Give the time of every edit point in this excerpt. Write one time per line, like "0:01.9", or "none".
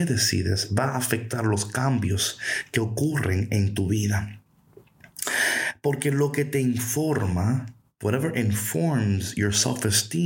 none